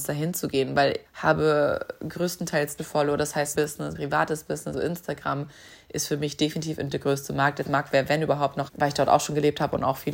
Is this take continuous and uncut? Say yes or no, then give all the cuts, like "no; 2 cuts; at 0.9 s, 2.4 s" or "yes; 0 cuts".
no; 8 cuts; at 1.0 s, 2.8 s, 3.5 s, 3.9 s, 4.7 s, 6.9 s, 7.6 s, 8.7 s